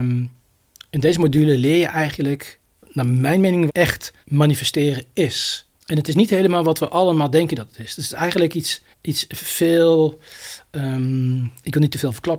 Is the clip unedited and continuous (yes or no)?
no